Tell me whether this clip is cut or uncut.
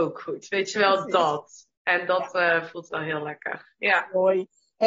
uncut